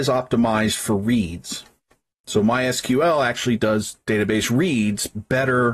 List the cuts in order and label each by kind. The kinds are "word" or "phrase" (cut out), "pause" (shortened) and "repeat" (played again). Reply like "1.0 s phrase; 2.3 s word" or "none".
none